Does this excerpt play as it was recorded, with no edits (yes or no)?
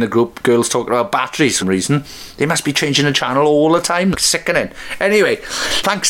no